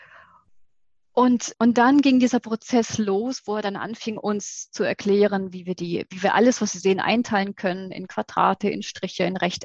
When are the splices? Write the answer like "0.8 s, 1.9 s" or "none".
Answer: 1.5 s

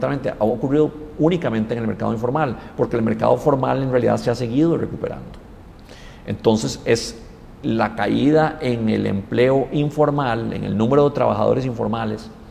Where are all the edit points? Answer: none

